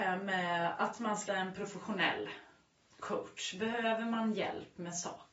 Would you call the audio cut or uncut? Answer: cut